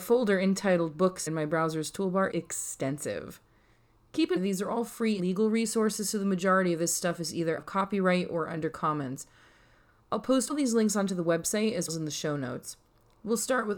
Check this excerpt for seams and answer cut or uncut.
cut